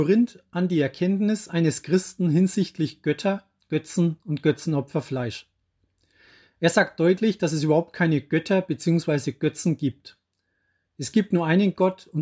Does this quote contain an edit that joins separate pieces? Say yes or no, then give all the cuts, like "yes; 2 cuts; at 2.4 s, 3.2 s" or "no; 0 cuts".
no; 0 cuts